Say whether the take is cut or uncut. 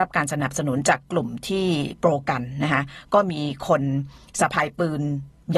uncut